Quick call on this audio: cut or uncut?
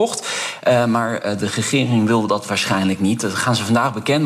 uncut